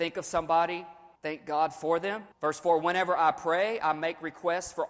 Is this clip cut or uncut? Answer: cut